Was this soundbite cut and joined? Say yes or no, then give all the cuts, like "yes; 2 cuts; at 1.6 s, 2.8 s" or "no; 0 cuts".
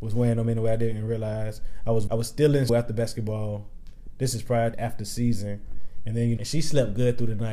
yes; 4 cuts; at 2.1 s, 2.7 s, 4.7 s, 6.4 s